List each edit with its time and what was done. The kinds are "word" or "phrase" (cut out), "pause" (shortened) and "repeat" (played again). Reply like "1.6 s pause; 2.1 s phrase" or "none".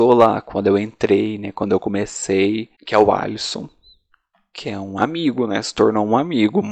2.7 s pause